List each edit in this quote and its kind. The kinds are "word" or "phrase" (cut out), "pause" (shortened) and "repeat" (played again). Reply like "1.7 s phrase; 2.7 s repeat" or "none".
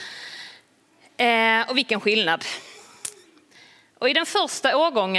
none

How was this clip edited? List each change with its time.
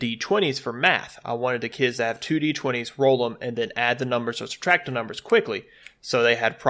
none

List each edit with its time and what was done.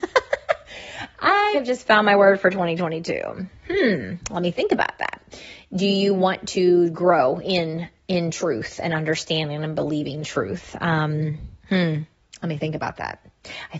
1.5 s word; 11.6 s pause

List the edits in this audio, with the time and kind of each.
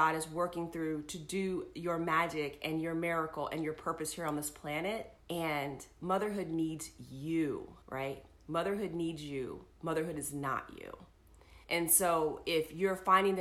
5.2 s pause; 7.8 s pause; 9.7 s pause; 11.6 s pause

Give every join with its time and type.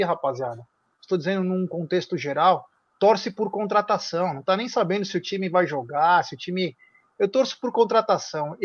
none

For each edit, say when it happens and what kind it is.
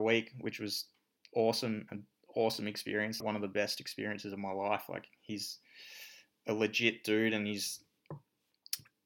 3.2 s word

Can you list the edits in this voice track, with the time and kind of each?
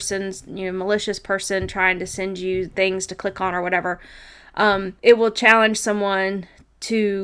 5.0 s pause

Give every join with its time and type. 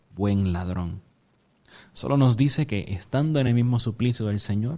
none

